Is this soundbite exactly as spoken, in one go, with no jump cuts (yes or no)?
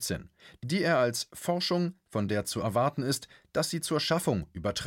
yes